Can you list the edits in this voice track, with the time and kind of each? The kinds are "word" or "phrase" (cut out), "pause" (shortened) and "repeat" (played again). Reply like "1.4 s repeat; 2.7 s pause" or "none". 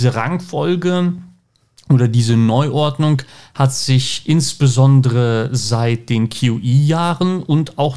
none